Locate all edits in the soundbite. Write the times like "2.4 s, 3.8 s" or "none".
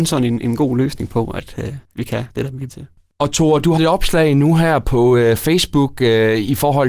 1.8 s, 2.7 s, 3.8 s